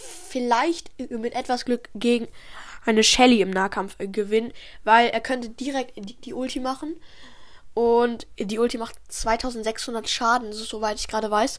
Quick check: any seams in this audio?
no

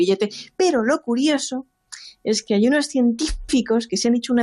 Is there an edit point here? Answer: no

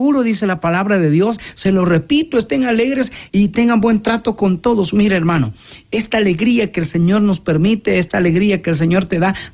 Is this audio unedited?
no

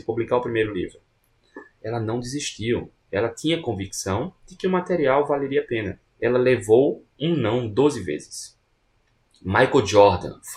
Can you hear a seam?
yes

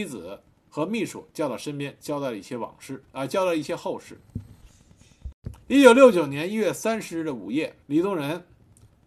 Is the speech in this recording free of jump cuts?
no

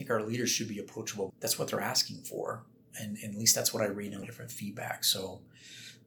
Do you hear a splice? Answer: yes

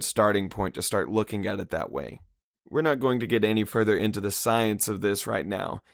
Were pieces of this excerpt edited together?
no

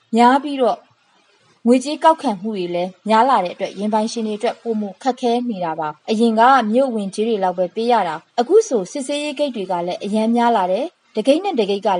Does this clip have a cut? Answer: yes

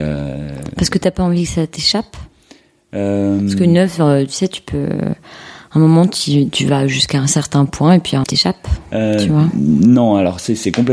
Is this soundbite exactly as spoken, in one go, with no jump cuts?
no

